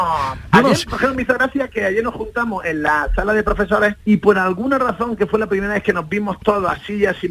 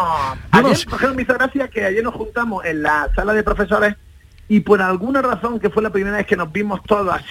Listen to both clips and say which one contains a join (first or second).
first